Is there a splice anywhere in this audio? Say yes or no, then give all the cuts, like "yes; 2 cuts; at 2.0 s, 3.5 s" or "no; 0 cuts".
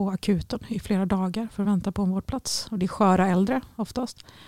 no; 0 cuts